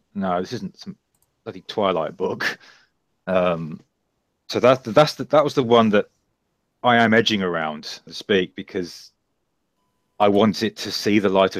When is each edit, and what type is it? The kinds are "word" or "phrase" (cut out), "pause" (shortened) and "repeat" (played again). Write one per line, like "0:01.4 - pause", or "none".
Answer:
0:08.1 - word